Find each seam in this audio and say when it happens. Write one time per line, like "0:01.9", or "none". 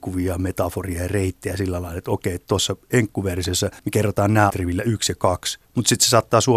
0:03.8
0:04.5
0:05.6